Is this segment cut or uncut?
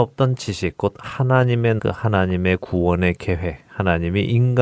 cut